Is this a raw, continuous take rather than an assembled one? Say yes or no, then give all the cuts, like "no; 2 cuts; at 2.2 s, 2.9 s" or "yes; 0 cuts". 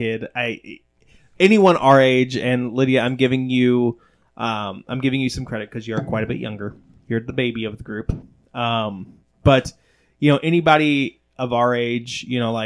yes; 0 cuts